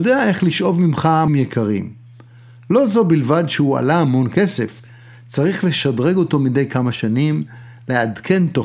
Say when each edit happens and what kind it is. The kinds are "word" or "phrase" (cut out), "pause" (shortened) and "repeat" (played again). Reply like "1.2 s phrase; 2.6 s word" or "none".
1.3 s word